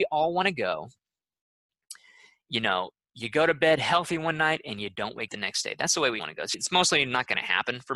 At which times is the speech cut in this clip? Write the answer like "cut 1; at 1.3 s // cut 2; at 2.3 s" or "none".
cut 1; at 5.3 s // cut 2; at 6.2 s // cut 3; at 6.5 s